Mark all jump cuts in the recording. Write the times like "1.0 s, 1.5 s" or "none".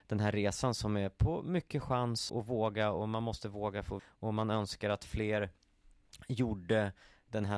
2.3 s, 4.0 s

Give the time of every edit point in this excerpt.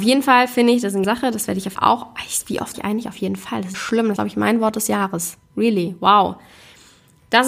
1.0 s, 1.8 s, 2.7 s, 3.7 s, 4.2 s

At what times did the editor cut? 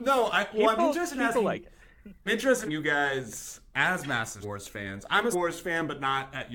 2.3 s, 2.7 s, 3.7 s, 4.4 s, 5.3 s

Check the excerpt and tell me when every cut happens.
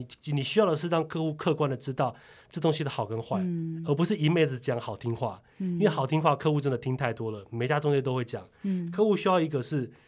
none

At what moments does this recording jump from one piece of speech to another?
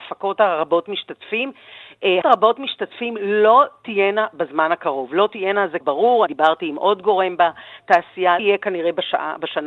2.2 s, 5.8 s, 6.3 s, 8.4 s

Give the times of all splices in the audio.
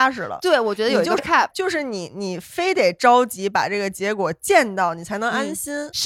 1.2 s, 1.5 s

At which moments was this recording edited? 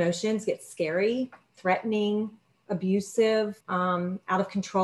3.6 s

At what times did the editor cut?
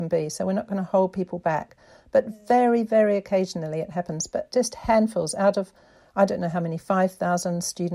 none

